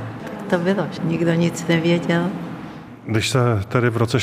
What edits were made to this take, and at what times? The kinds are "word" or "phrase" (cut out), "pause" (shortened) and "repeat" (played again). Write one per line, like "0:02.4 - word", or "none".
0:01.0 - word

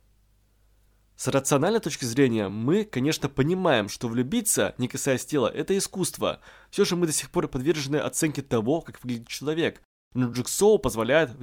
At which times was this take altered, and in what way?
none

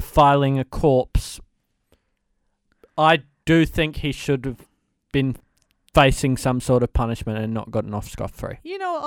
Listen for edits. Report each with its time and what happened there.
none

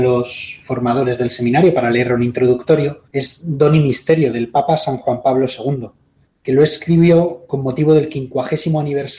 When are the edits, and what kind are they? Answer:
0:03.1 - pause
0:06.2 - pause

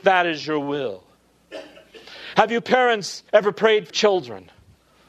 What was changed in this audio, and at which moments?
0:03.3 - pause
0:03.9 - word

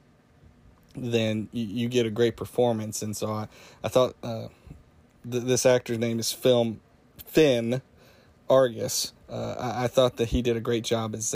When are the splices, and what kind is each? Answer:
0:09.2 - pause

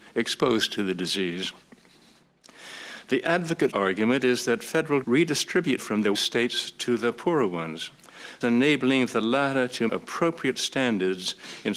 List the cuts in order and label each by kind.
0:03.7 - word
0:05.0 - word
0:05.8 - word
0:06.1 - word
0:08.4 - word
0:09.9 - word

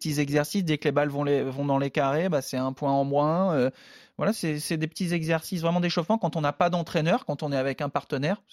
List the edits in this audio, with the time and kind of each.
none

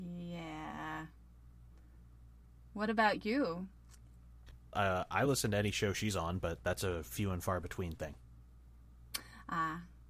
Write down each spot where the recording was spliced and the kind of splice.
none

